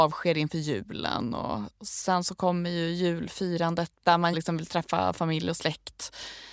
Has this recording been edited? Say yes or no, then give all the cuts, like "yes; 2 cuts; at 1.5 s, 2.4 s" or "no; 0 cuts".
yes; 1 cut; at 4.3 s